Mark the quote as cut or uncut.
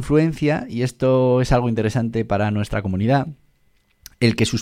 uncut